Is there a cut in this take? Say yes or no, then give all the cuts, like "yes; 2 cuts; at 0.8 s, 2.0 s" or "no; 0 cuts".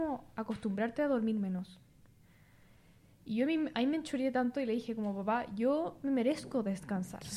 no; 0 cuts